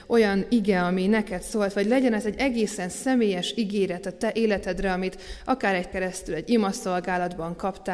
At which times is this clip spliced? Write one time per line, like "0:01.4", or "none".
0:05.9